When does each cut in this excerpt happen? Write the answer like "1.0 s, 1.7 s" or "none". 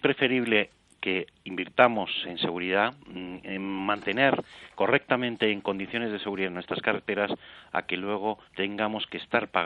3.0 s, 8.4 s